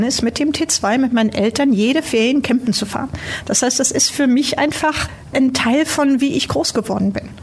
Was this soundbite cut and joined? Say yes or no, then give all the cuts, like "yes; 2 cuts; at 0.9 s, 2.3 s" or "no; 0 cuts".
no; 0 cuts